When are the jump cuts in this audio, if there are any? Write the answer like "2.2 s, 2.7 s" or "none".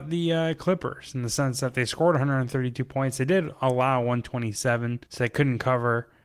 5.1 s